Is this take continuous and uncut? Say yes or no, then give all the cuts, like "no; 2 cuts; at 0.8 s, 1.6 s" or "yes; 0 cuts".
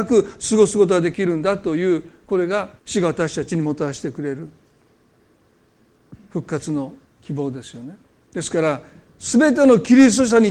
no; 3 cuts; at 2.8 s, 7.1 s, 8.1 s